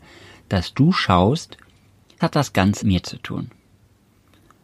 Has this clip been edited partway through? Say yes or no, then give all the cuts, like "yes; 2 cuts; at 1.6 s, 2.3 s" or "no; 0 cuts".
yes; 2 cuts; at 2.2 s, 2.8 s